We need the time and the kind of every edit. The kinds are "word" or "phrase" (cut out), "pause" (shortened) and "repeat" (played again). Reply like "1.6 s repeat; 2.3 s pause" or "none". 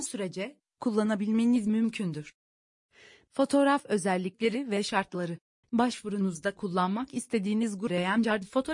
5.6 s pause